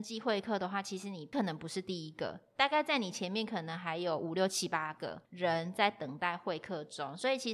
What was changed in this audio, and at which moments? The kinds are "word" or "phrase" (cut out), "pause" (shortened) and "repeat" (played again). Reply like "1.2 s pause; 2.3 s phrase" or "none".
5.2 s pause